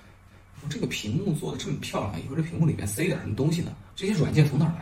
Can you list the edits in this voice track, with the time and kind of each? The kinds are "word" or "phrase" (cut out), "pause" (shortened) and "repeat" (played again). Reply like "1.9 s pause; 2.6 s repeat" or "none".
3.9 s pause